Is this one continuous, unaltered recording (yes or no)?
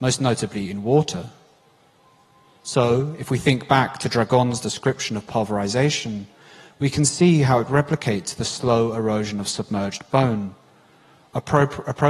yes